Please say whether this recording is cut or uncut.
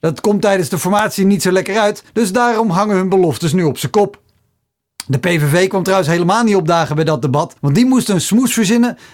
cut